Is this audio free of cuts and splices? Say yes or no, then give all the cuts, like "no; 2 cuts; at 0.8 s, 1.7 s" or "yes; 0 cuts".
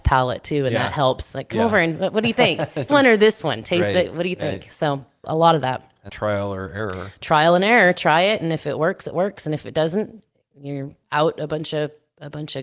no; 4 cuts; at 2.9 s, 5.2 s, 6.1 s, 11.0 s